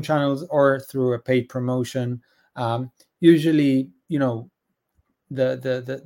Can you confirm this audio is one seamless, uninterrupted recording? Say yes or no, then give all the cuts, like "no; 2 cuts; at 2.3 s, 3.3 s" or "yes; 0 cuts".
yes; 0 cuts